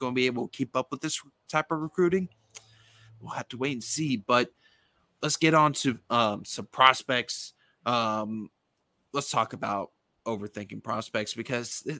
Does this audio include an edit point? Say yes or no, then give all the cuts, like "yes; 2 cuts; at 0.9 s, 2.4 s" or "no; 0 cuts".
no; 0 cuts